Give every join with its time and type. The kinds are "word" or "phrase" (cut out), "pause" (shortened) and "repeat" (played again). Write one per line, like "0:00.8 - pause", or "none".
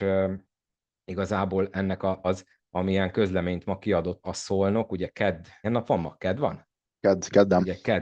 0:02.2 - word
0:04.2 - word
0:05.6 - word

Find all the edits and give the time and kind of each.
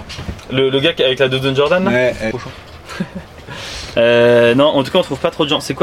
0:02.3 - phrase

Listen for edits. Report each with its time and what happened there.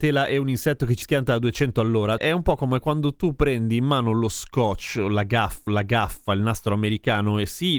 0:01.0 - word
0:02.2 - word
0:05.7 - repeat

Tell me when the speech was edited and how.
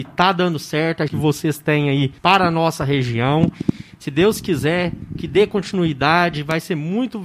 0:01.1 - phrase
0:02.2 - pause

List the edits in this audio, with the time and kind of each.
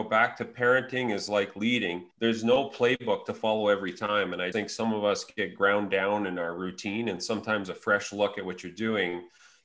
0:02.1 - pause
0:04.5 - word

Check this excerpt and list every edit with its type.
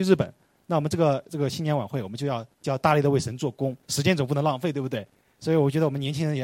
0:02.5 - pause
0:03.8 - pause

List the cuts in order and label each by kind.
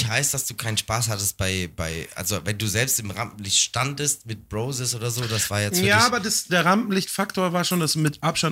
0:06.5 - word

